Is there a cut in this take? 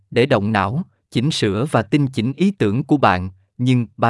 no; 0 cuts

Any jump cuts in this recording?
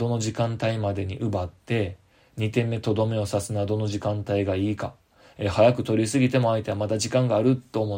no; 0 cuts

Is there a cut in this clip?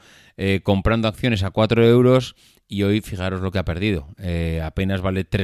no; 0 cuts

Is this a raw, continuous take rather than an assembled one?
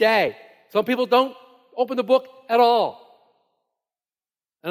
yes; 0 cuts

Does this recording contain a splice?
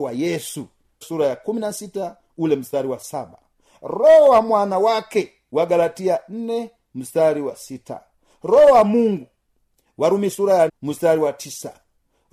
yes; 2 cuts; at 1.0 s, 10.7 s

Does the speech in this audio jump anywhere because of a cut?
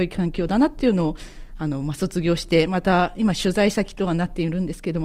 no; 0 cuts

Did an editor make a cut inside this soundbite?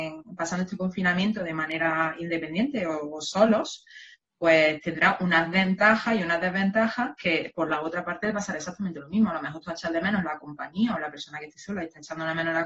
no; 0 cuts

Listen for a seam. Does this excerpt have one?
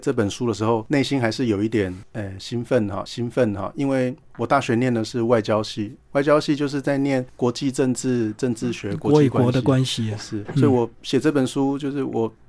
yes; 1 cut; at 3.1 s

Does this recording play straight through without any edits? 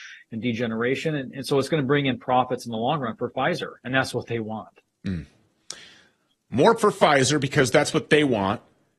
no; 1 cut; at 6.8 s

